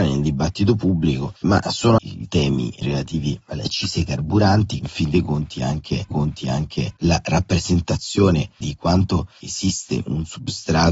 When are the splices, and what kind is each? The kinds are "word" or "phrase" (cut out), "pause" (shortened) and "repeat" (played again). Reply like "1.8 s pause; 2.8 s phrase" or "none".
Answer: 1.4 s pause; 2.0 s phrase; 2.8 s phrase; 4.8 s phrase; 6.1 s repeat; 8.6 s phrase